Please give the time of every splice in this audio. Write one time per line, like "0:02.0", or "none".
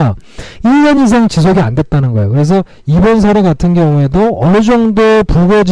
none